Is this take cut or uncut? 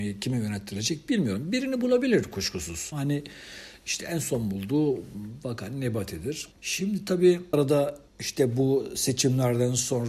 cut